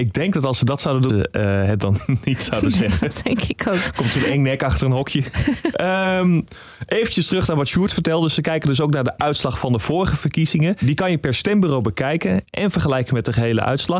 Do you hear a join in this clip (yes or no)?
yes